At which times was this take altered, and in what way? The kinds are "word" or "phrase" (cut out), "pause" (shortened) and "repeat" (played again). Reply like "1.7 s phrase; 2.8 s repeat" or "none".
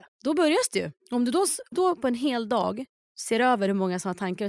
1.0 s pause; 1.7 s word; 2.9 s pause